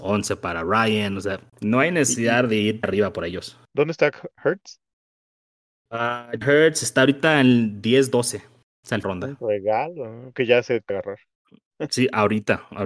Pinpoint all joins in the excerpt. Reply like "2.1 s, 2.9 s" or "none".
1.5 s, 2.8 s, 3.6 s, 6.4 s, 8.7 s, 9.0 s, 10.3 s, 10.9 s